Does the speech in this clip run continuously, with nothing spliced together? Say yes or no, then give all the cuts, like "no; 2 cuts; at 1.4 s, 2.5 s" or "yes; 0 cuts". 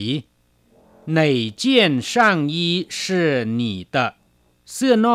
yes; 0 cuts